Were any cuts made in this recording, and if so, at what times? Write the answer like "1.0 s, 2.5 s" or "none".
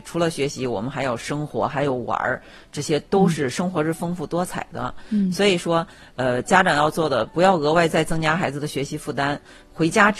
none